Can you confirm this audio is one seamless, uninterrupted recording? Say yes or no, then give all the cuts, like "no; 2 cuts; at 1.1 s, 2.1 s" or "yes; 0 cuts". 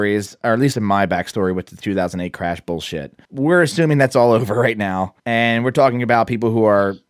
no; 2 cuts; at 3.2 s, 5.2 s